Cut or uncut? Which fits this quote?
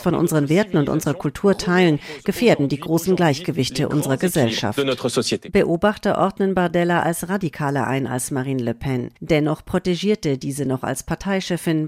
cut